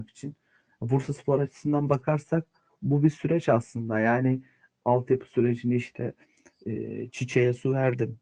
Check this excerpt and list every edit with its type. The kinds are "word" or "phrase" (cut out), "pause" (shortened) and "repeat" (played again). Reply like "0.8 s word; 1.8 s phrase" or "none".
none